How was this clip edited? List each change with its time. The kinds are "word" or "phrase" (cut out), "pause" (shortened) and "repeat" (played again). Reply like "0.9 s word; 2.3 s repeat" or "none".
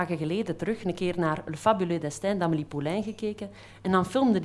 none